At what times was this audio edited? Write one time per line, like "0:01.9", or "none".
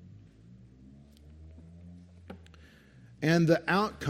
none